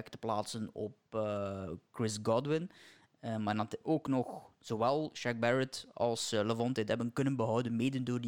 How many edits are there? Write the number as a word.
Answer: two